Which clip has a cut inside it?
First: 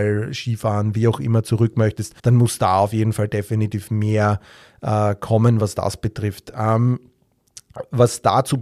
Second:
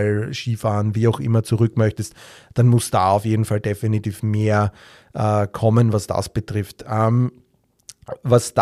first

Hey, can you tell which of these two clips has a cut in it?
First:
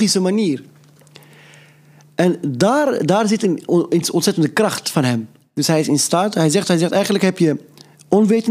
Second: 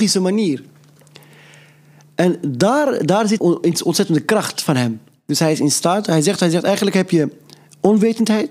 second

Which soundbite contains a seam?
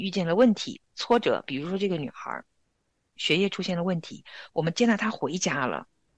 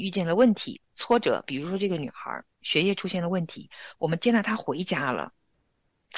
second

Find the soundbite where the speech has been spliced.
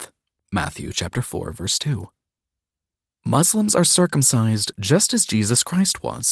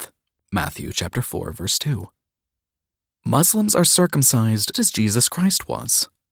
second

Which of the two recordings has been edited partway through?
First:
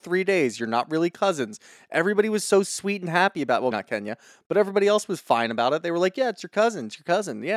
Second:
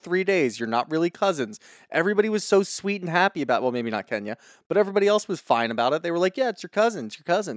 first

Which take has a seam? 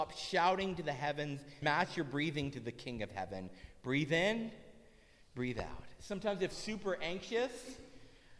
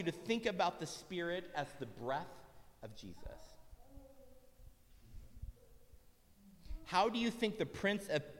first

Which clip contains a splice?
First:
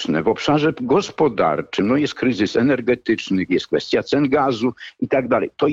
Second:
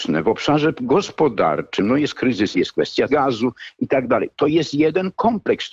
second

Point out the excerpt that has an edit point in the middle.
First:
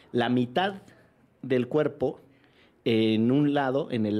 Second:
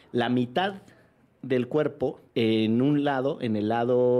second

